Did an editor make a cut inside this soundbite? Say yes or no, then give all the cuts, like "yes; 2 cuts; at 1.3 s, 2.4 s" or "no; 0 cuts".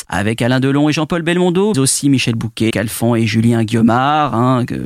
yes; 2 cuts; at 1.7 s, 2.7 s